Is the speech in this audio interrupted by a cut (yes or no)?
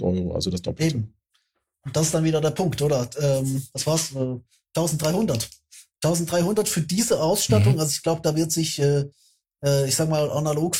no